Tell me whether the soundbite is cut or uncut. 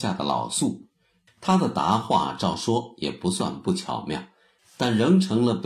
uncut